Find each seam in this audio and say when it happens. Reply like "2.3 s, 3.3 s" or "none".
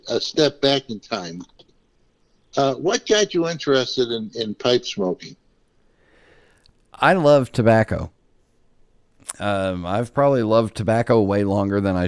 none